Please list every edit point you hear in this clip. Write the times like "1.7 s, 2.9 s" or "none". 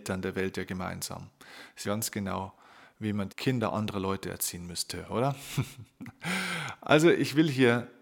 1.8 s, 3.3 s